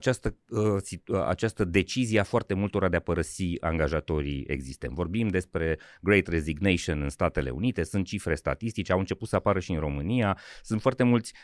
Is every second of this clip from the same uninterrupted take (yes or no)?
yes